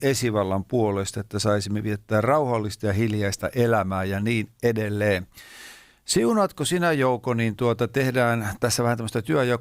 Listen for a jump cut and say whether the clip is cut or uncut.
uncut